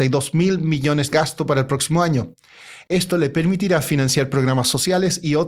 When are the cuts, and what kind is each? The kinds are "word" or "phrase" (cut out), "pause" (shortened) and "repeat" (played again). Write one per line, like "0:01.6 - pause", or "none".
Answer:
0:01.1 - phrase